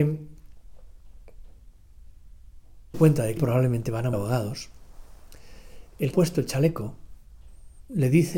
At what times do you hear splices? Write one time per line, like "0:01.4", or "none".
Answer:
0:02.9
0:03.4
0:04.1
0:06.1